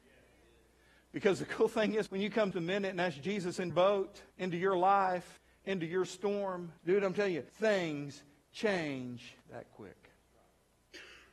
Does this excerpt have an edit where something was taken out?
yes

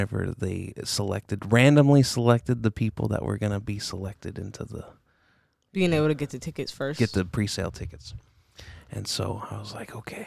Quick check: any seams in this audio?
no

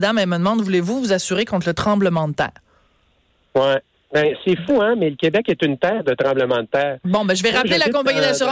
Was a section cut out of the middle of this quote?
no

